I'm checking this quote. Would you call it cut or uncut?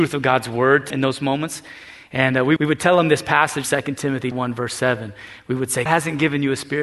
cut